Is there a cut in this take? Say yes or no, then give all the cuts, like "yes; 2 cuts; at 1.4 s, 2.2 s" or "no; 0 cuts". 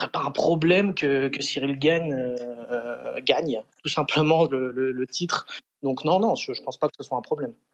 no; 0 cuts